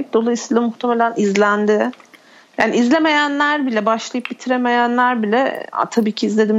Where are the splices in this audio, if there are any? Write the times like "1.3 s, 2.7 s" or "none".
none